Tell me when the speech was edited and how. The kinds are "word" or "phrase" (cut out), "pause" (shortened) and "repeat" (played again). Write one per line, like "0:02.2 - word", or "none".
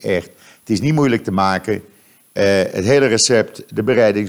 none